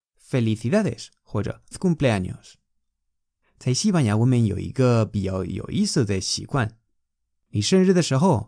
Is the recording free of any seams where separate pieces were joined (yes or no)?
no